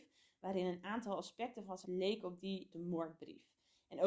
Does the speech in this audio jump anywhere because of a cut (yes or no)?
yes